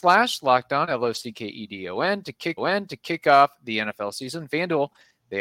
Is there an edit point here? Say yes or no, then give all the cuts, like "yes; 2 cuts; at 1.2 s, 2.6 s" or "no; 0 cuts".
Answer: yes; 1 cut; at 2.6 s